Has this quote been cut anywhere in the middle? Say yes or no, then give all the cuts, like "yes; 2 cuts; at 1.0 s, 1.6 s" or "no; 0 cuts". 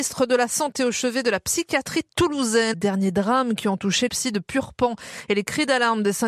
yes; 2 cuts; at 2.7 s, 4.1 s